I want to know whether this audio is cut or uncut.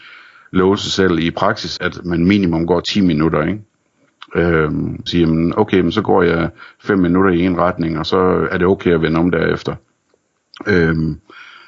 cut